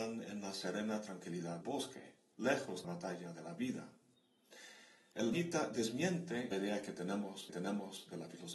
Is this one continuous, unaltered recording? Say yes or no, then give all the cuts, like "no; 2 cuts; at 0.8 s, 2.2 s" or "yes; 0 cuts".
no; 5 cuts; at 1.6 s, 2.8 s, 5.3 s, 6.5 s, 7.5 s